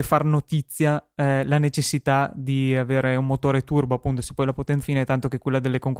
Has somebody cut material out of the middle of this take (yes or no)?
yes